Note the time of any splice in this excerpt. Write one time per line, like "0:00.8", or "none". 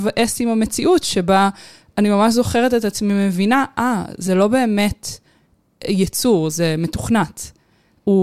none